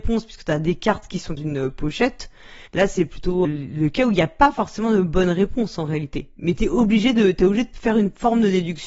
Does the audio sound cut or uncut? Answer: cut